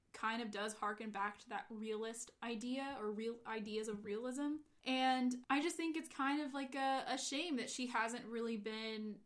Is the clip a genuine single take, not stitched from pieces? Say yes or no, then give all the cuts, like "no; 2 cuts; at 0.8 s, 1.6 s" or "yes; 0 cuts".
yes; 0 cuts